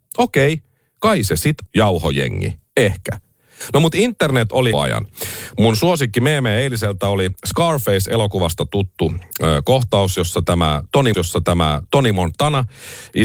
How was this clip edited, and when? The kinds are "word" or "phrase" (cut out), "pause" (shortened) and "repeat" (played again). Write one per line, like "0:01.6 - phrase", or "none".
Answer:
0:01.7 - word
0:02.7 - pause
0:04.7 - phrase
0:11.1 - repeat